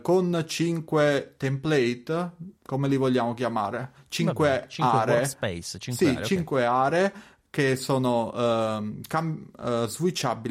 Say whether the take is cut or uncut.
cut